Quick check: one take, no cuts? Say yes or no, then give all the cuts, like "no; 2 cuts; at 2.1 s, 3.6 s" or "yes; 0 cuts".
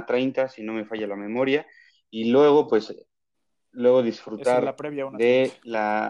yes; 0 cuts